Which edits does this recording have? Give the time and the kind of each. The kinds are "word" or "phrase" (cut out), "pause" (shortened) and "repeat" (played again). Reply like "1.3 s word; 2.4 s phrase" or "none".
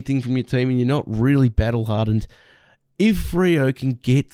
none